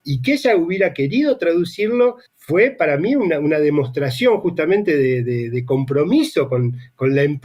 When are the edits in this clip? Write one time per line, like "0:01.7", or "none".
0:02.3